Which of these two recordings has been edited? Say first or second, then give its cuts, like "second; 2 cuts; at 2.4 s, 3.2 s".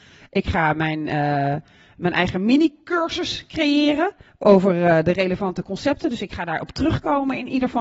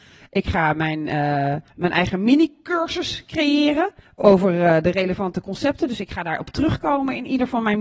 second; 1 cut; at 1.7 s